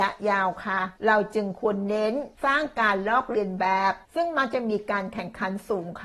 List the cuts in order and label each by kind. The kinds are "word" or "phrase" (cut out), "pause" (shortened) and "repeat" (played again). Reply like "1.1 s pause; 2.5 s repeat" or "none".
1.0 s pause; 2.3 s pause; 4.0 s pause

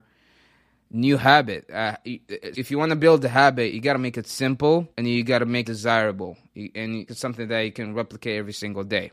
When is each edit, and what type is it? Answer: 2.5 s word; 4.9 s pause; 5.6 s word; 7.1 s phrase

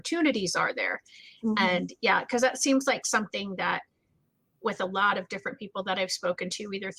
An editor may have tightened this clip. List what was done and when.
none

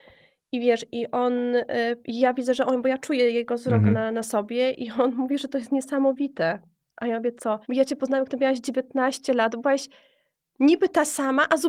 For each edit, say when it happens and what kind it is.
7.6 s pause

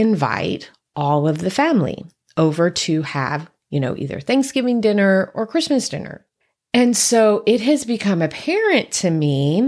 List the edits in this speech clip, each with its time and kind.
none

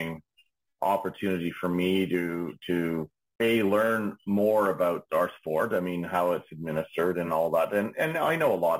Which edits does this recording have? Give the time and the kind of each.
none

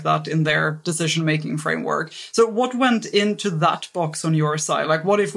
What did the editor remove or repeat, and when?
none

